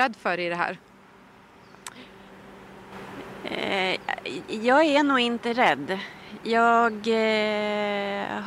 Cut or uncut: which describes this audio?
uncut